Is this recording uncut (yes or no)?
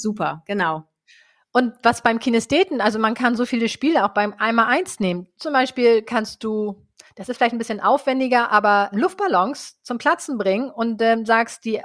no